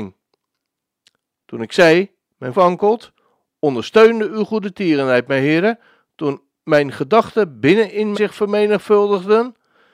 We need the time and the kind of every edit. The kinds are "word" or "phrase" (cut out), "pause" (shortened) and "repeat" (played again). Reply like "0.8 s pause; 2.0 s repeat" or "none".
2.5 s word; 8.1 s word